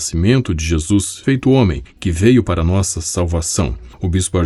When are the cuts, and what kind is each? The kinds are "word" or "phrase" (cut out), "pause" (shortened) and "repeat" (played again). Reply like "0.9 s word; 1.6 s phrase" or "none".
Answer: 1.2 s phrase